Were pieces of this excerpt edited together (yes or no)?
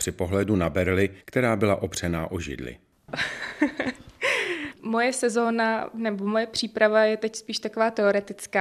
yes